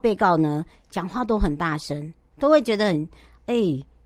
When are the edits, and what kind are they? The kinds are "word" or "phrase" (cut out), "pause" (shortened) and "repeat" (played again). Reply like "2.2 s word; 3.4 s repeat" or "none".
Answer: 2.3 s word